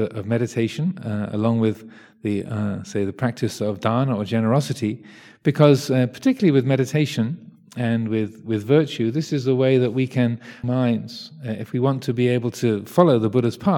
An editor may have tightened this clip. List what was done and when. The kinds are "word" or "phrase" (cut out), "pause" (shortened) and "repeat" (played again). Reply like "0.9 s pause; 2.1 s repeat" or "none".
10.6 s phrase